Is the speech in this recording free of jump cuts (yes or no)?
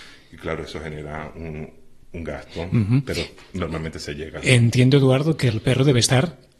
yes